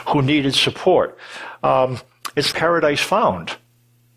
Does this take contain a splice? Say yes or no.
yes